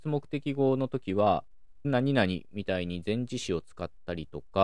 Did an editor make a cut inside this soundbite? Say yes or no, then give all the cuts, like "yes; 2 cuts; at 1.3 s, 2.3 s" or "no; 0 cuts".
yes; 1 cut; at 1.8 s